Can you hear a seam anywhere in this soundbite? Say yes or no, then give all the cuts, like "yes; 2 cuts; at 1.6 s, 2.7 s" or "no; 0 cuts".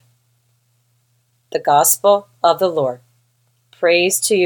no; 0 cuts